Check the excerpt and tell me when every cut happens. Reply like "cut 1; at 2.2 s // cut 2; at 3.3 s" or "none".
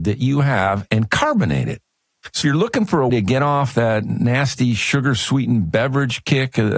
cut 1; at 2.4 s // cut 2; at 3.1 s